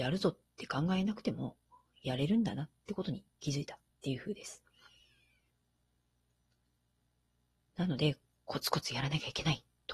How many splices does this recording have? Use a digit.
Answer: 0